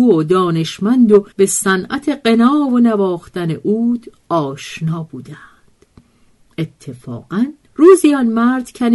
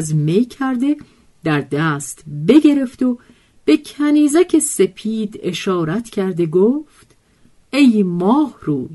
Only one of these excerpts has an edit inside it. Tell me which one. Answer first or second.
first